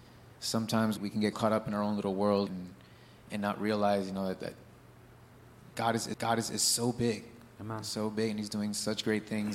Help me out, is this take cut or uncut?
cut